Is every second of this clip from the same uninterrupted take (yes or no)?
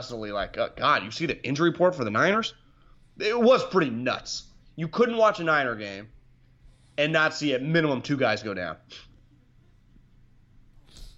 yes